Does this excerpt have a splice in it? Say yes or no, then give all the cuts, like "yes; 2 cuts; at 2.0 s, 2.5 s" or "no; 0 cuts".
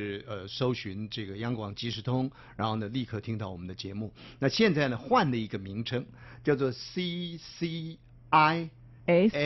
no; 0 cuts